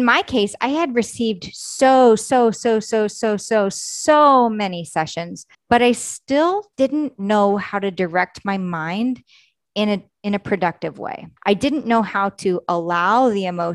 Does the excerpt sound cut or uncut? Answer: cut